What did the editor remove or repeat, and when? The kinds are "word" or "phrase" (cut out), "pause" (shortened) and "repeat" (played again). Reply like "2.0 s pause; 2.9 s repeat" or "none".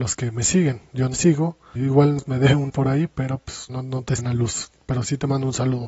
1.1 s word; 1.8 s word; 2.2 s word; 2.7 s word; 3.7 s word; 4.2 s word